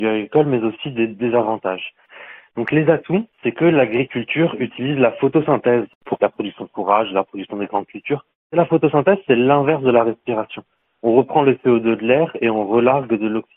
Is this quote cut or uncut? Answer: uncut